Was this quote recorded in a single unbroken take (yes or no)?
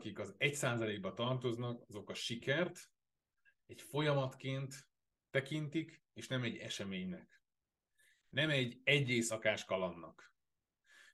yes